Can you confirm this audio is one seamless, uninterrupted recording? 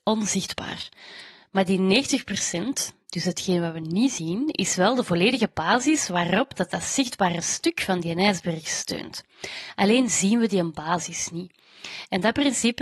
yes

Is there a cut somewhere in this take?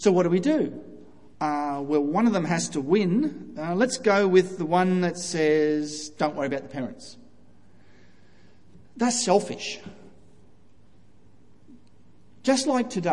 yes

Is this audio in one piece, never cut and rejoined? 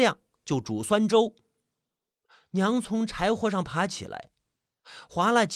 yes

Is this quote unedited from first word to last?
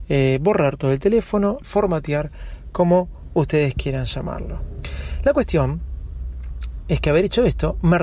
no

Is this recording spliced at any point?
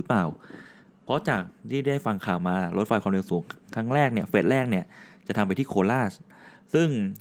no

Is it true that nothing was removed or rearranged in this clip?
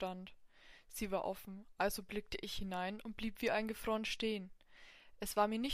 yes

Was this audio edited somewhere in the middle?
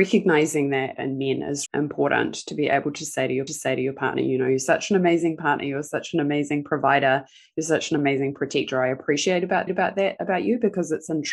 yes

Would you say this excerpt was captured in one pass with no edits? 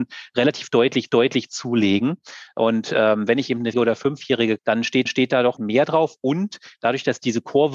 no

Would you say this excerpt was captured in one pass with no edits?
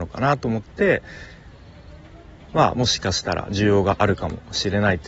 yes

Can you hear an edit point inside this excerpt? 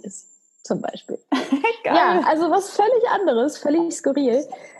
no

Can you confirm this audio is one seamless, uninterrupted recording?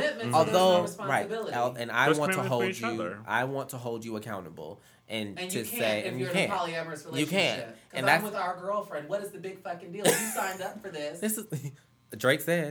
yes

